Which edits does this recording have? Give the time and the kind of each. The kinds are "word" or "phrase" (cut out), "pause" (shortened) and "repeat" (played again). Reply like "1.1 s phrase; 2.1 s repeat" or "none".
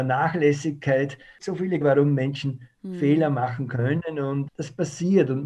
1.4 s word; 1.8 s word; 4.5 s word